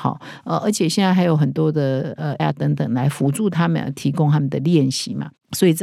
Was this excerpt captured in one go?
no; 1 cut; at 2.4 s

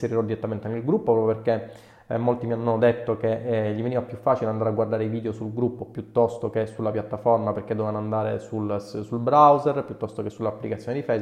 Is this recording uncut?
yes; 0 cuts

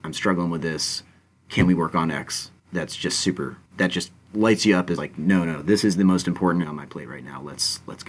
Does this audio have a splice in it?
yes; 4 cuts; at 2.6 s, 3.7 s, 5.0 s, 6.6 s

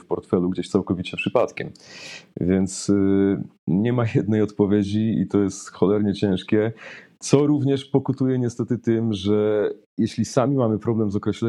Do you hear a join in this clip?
no; 0 cuts

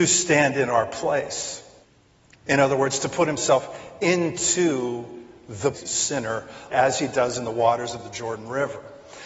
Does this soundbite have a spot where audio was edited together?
yes; 3 cuts; at 1.8 s, 5.7 s, 6.7 s

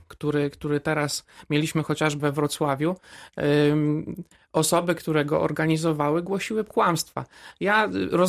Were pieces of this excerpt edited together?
yes; 2 cuts; at 2.2 s, 6.7 s

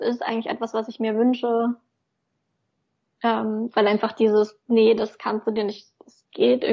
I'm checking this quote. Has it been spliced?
no; 0 cuts

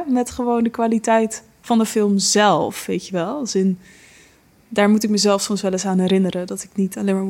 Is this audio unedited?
yes; 0 cuts

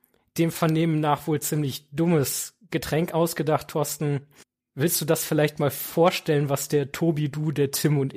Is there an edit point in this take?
yes; 1 cut; at 4.4 s

